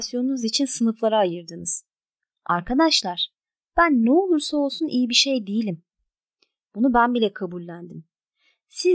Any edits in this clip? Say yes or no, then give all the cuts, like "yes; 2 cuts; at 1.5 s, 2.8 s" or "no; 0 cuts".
no; 0 cuts